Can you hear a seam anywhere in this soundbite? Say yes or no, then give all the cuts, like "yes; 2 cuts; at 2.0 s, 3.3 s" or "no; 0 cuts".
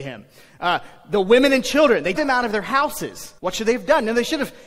yes; 2 cuts; at 2.2 s, 3.4 s